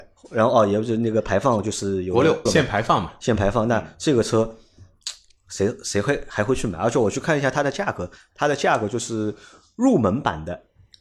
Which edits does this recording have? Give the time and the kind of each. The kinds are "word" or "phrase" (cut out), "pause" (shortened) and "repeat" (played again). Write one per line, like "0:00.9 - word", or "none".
0:02.5 - word